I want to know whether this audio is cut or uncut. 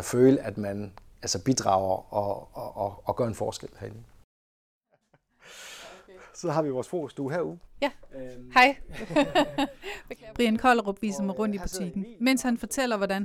uncut